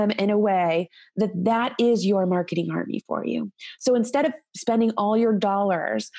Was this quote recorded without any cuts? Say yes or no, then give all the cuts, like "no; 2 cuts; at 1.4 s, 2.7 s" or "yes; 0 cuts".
yes; 0 cuts